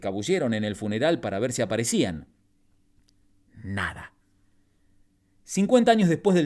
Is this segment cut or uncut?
uncut